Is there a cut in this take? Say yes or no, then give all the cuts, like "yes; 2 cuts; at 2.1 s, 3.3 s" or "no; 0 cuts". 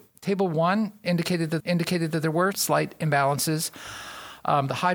yes; 2 cuts; at 1.6 s, 2.5 s